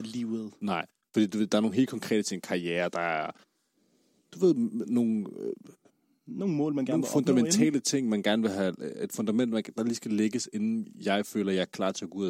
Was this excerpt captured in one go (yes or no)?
yes